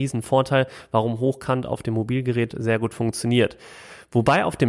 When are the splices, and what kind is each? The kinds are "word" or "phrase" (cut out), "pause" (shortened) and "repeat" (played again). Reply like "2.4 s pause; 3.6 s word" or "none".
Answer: none